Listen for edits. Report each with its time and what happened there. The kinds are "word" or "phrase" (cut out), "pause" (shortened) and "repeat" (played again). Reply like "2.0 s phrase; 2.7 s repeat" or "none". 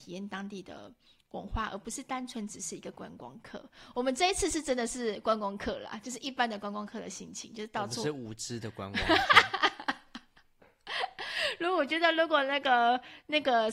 none